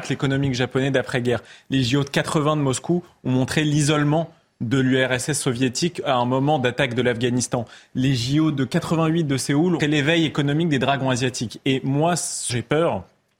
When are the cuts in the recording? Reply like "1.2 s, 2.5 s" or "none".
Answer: 9.8 s, 12.5 s